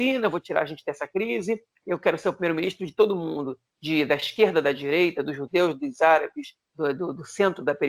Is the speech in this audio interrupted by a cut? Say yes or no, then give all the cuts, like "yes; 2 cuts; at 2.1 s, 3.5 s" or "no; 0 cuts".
no; 0 cuts